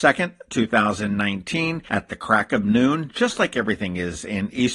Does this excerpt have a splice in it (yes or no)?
no